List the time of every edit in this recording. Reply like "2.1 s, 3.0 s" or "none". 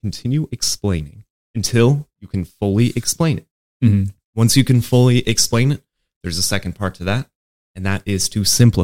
none

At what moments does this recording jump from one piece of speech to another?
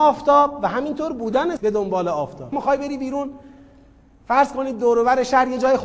1.6 s, 2.5 s

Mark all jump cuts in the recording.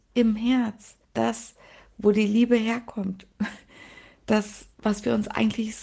1.0 s, 4.7 s

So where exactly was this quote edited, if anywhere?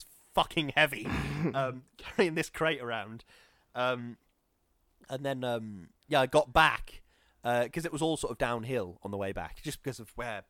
none

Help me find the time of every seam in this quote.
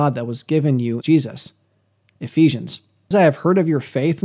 1.0 s, 3.1 s

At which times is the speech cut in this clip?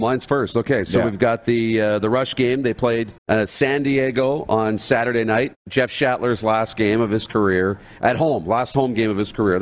3.2 s

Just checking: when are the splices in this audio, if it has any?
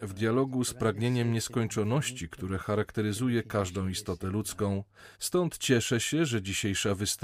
5.1 s

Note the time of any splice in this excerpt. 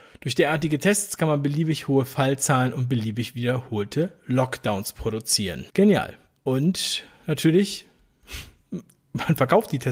5.7 s

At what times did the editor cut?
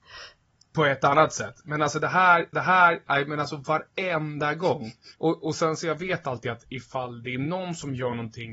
2.5 s, 5.1 s, 6.7 s

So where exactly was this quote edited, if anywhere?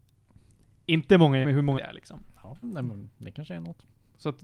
1.4 s, 1.7 s, 2.6 s

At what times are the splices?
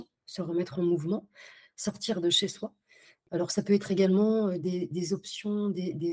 none

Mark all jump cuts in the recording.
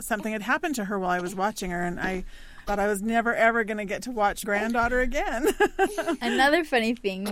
2.7 s, 4.4 s

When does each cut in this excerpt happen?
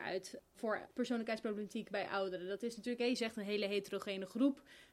none

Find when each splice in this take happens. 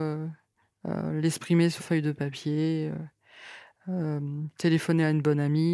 1.8 s

